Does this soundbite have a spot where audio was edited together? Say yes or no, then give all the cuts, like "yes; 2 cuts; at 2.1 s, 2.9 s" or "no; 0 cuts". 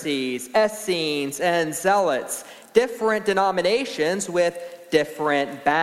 no; 0 cuts